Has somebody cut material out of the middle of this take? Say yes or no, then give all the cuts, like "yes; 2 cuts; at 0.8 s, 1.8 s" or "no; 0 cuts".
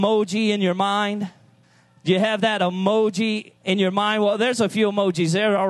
yes; 2 cuts; at 1.6 s, 3.6 s